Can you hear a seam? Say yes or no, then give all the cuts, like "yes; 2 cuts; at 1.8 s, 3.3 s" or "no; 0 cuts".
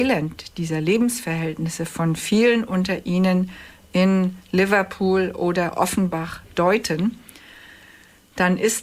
no; 0 cuts